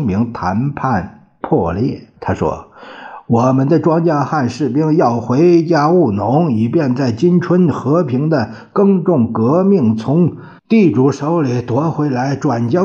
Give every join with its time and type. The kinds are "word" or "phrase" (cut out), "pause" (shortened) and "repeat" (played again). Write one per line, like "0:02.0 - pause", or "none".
0:02.2 - pause
0:10.6 - pause

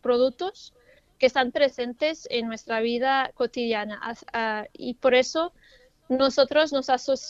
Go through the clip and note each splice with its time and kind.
0:01.5 - word

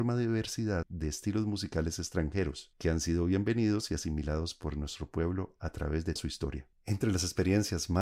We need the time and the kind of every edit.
0:06.2 - word

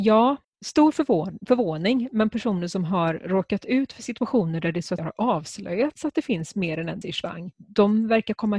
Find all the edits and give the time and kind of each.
0:05.0 - word
0:07.0 - word

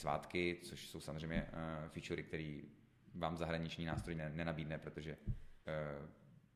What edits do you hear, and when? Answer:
0:04.2 - word
0:05.6 - word

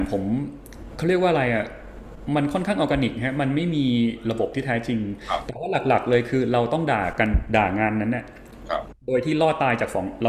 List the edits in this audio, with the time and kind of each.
0:09.0 - pause

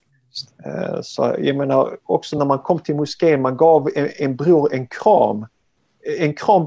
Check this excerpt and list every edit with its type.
none

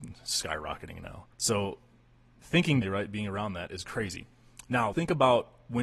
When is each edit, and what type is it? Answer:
0:01.3 - pause
0:02.8 - word
0:04.9 - word

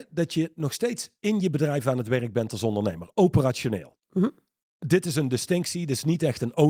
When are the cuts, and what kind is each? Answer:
none

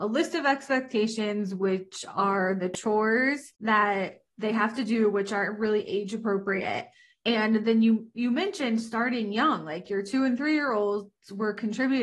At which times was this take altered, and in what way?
none

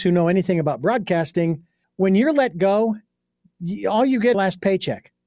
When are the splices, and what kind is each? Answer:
0:01.8 - pause
0:04.3 - phrase

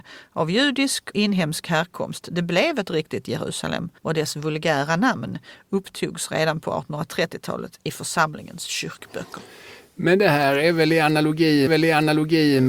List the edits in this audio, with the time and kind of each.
0:01.1 - word
0:04.0 - pause
0:11.7 - repeat

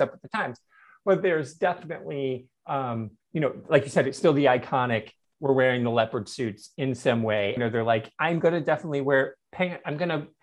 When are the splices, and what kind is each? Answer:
0:03.2 - pause
0:07.6 - phrase

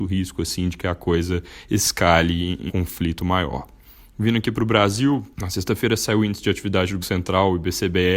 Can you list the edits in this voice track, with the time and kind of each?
0:02.7 - word
0:05.3 - pause
0:07.0 - word

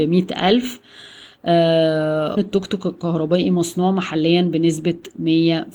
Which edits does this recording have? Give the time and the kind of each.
0:02.4 - word

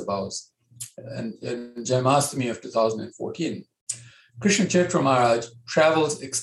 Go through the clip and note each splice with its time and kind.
none

